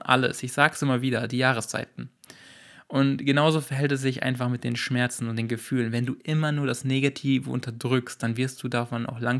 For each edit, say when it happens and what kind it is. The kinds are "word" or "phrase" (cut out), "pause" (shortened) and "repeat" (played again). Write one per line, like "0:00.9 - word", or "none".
none